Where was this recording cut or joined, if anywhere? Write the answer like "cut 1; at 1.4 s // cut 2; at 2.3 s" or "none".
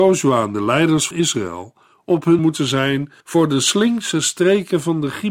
cut 1; at 1.1 s // cut 2; at 2.4 s // cut 3; at 3.2 s